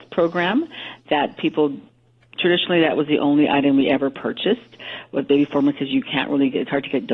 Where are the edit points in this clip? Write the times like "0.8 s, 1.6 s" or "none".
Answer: none